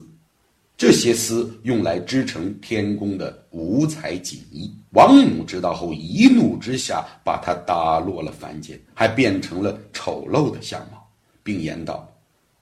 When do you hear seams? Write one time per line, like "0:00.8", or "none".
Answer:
0:04.9
0:08.8